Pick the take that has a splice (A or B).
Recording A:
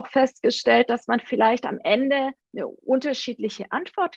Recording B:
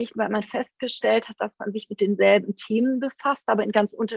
A